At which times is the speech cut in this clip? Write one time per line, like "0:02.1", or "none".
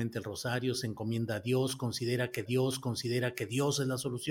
0:02.5